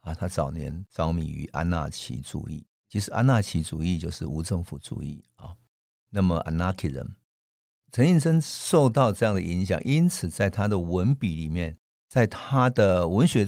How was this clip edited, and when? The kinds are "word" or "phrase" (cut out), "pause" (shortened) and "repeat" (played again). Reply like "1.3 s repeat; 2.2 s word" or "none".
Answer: none